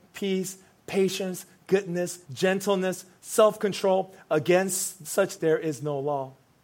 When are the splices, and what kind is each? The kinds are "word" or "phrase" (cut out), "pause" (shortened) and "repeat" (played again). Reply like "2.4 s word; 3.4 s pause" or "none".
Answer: 1.6 s word; 2.2 s word; 5.4 s word